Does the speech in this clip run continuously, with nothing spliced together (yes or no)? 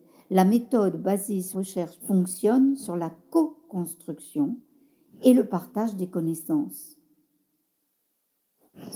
no